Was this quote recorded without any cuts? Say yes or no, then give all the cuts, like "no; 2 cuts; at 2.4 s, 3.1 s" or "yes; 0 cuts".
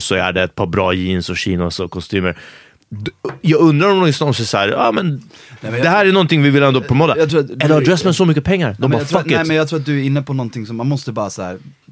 yes; 0 cuts